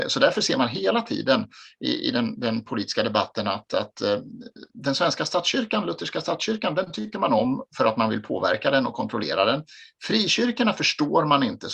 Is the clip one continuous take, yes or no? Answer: no